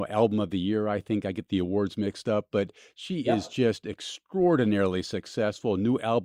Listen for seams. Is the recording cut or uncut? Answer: uncut